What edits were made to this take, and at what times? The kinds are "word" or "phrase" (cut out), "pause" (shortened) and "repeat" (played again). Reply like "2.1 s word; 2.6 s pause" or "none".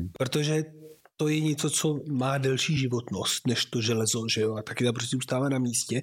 none